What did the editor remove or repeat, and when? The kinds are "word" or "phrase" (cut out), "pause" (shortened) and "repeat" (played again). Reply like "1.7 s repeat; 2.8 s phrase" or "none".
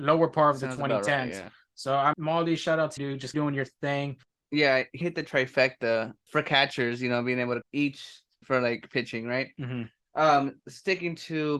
2.1 s word; 3.0 s word; 3.3 s word; 5.0 s word; 6.3 s word; 7.6 s word; 8.4 s word